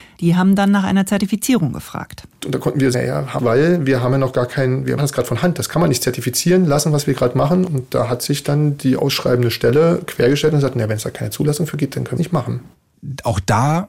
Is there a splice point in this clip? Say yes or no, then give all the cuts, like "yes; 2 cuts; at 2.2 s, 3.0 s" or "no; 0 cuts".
yes; 4 cuts; at 2.9 s, 3.4 s, 5.0 s, 12.2 s